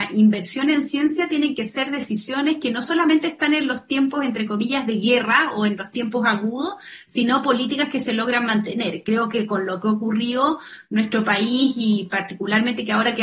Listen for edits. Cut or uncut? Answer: uncut